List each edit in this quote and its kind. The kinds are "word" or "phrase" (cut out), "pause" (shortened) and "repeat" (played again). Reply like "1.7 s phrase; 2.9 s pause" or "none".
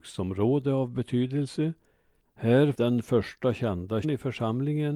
2.7 s word; 4.0 s word